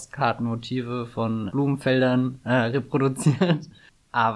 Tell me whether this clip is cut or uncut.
cut